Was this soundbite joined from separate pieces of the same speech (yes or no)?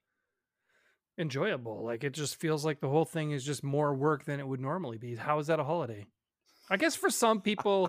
no